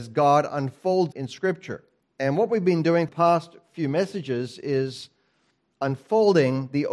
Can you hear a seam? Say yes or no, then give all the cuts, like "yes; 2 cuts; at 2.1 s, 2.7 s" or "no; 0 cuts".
yes; 3 cuts; at 1.1 s, 2.0 s, 3.1 s